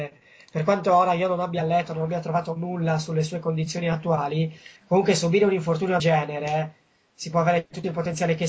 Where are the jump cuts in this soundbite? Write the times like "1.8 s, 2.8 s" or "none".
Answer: 4.8 s, 6.0 s